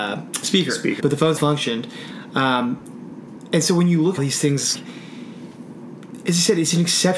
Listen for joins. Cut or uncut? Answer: cut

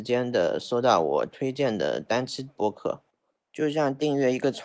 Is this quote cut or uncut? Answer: uncut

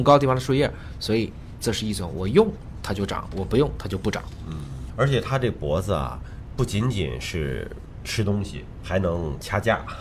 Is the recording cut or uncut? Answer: cut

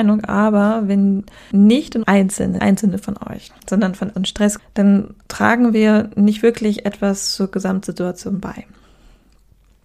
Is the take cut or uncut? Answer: cut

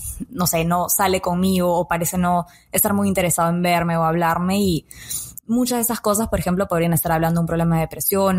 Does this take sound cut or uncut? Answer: uncut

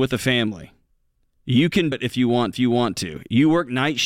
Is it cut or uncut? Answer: cut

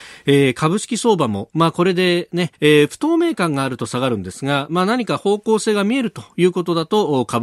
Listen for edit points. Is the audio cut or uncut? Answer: cut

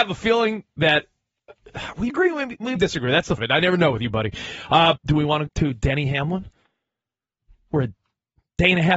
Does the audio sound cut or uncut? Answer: cut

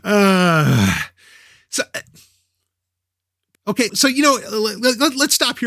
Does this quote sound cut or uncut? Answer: cut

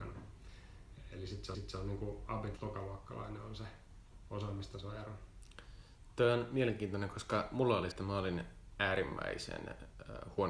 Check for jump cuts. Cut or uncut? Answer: cut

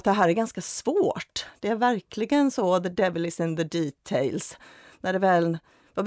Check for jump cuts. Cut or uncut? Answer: uncut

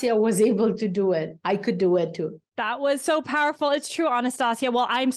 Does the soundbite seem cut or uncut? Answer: cut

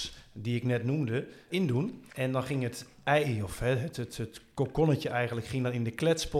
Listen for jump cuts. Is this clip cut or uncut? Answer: cut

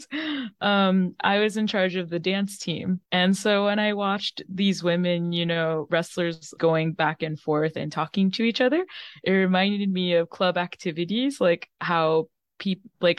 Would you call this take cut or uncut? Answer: cut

